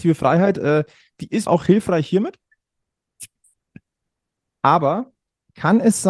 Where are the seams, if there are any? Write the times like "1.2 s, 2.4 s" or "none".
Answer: 1.5 s

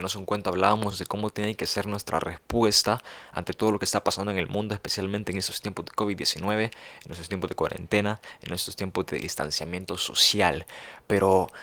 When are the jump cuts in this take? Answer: none

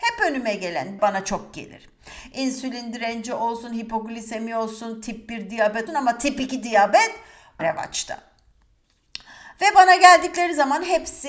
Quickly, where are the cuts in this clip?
1.0 s, 5.9 s, 7.6 s

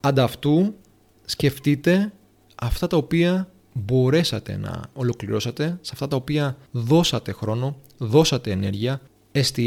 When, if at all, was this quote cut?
6.7 s

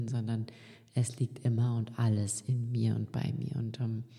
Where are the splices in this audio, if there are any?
none

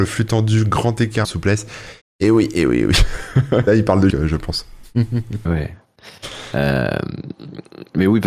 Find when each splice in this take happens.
1.2 s, 2.0 s, 3.7 s, 4.1 s, 5.4 s

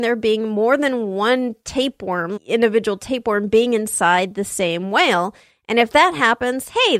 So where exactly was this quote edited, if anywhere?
2.4 s

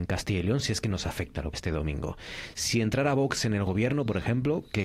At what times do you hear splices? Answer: 1.5 s

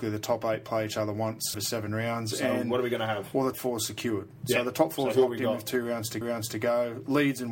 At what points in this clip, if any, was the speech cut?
1.5 s, 3.5 s, 6.2 s

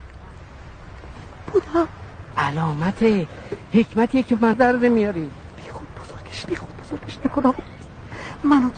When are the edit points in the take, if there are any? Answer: 2.3 s, 4.5 s, 6.5 s

